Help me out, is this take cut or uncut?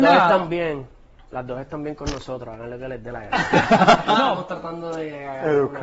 uncut